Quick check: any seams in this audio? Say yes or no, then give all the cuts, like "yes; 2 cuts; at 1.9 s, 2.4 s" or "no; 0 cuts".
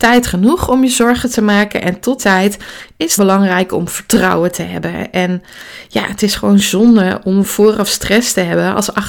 yes; 2 cuts; at 2.2 s, 3.2 s